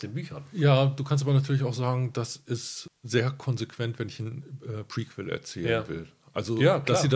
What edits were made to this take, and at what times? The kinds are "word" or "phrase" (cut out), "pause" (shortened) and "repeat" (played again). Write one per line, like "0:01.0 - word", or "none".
none